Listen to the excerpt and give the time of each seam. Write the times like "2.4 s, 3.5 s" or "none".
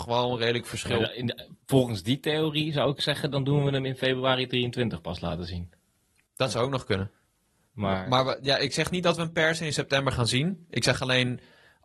none